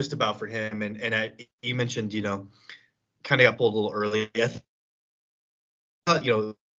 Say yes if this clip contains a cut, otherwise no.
no